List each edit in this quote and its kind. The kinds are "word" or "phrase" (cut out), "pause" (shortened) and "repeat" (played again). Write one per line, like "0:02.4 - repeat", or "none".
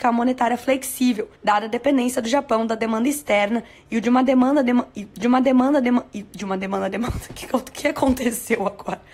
0:01.4 - pause
0:05.2 - repeat